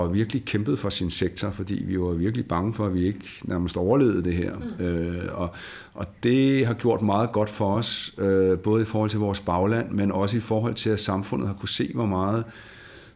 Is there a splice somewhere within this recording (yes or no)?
no